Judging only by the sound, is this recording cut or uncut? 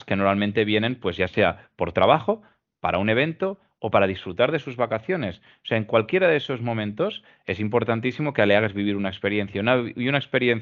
uncut